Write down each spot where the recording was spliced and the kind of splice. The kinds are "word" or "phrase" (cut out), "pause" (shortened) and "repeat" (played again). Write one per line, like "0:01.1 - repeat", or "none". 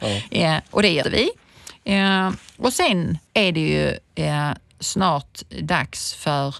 0:01.0 - word
0:03.3 - pause